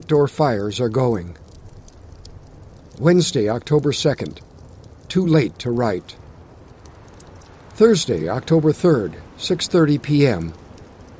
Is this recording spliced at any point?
no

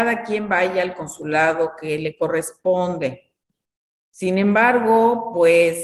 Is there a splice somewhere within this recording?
no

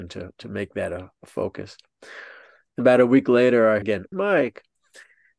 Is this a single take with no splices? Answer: no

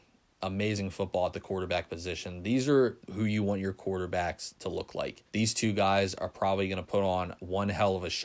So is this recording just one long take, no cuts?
no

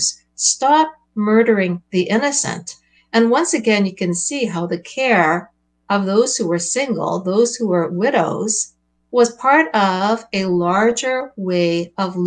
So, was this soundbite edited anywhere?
no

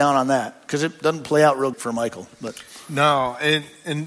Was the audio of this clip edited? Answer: yes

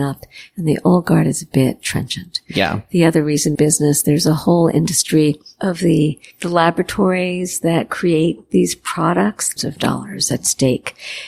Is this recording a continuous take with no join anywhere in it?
no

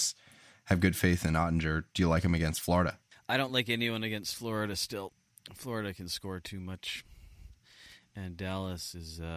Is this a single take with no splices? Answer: yes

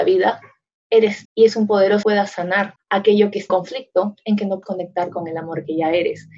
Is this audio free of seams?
no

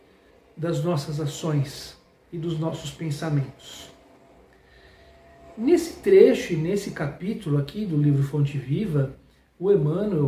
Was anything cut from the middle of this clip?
no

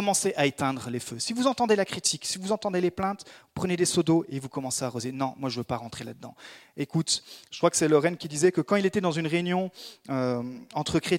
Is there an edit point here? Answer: yes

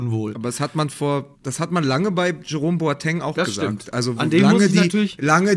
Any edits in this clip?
yes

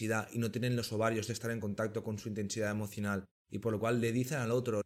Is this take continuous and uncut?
yes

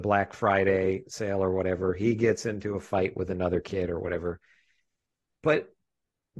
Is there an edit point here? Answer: no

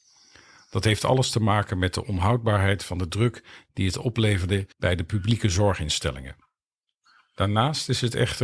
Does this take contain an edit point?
yes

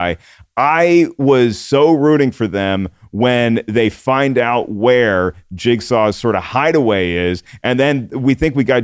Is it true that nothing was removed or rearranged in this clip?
yes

